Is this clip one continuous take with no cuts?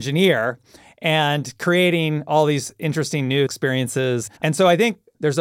no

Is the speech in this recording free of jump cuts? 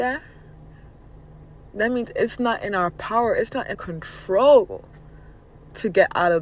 no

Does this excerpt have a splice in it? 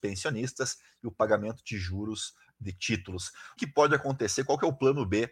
yes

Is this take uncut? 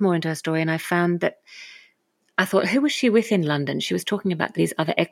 yes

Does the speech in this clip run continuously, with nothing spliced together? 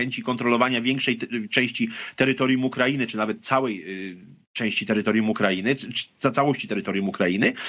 yes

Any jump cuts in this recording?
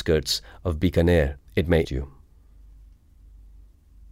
yes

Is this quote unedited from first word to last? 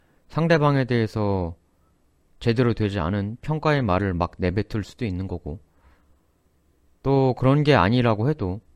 yes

